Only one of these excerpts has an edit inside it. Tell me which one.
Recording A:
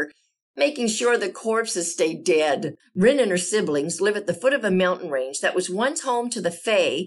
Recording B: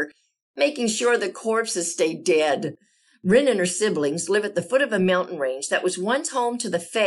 A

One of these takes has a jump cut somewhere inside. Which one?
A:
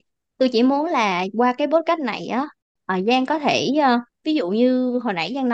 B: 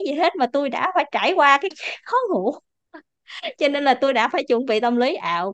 B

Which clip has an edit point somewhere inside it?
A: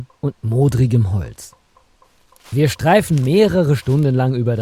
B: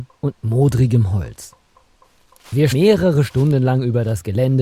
B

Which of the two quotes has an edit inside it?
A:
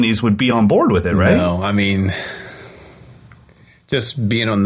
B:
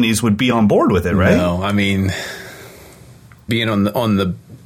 B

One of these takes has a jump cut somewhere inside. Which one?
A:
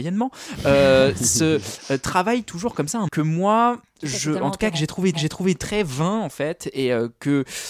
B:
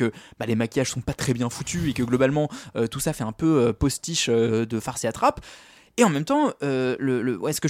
A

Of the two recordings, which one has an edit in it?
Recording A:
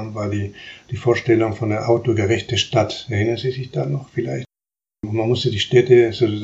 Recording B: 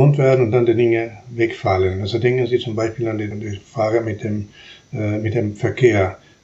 B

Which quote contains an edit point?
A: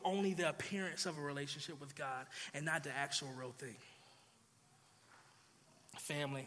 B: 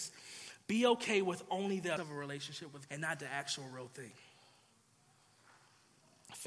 B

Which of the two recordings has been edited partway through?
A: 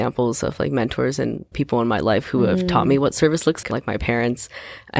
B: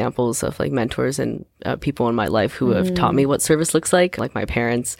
A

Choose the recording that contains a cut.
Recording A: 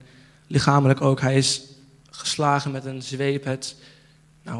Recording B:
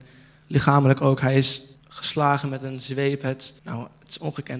B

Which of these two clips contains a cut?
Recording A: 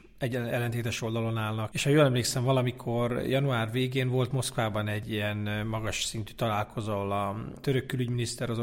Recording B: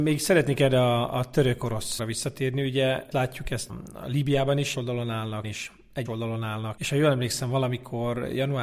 B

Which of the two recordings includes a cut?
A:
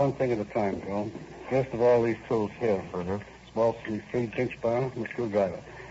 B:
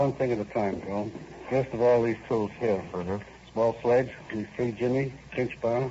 A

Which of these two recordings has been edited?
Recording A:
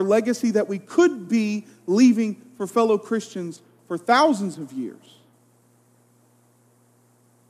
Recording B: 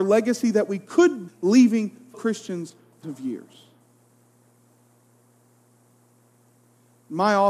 B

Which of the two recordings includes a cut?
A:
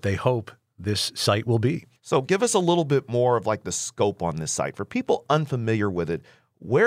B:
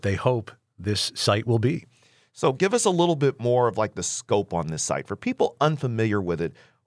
A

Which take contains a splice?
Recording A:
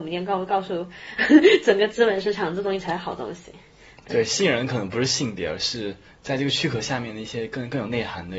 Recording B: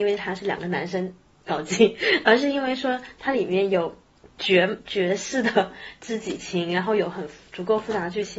A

